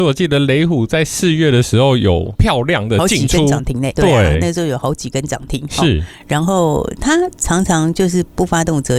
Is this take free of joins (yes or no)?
no